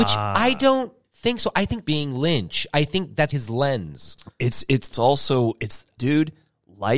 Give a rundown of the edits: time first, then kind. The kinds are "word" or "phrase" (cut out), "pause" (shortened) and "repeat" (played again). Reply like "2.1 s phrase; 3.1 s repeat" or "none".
1.1 s pause; 1.9 s phrase; 3.3 s word; 4.9 s phrase; 6.0 s word